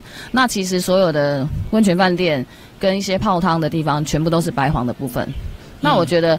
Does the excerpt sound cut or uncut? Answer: uncut